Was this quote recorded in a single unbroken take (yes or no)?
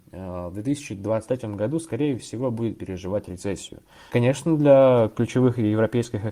yes